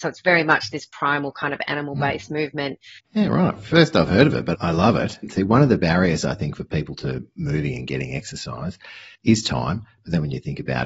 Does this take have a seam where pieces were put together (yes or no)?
yes